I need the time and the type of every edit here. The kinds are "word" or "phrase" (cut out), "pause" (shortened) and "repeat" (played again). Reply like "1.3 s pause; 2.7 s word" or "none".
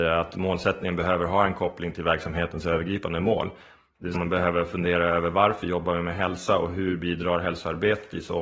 4.1 s word

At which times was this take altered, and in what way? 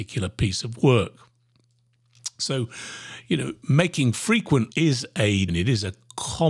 4.7 s phrase; 5.5 s word

